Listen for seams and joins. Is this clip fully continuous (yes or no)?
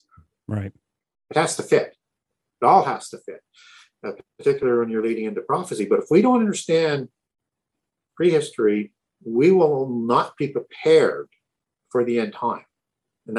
yes